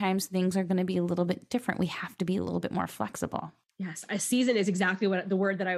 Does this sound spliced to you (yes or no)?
no